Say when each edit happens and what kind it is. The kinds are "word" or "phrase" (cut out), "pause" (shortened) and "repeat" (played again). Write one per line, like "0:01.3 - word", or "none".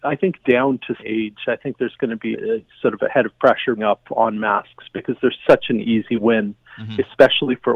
0:01.0 - word
0:02.3 - word
0:03.8 - word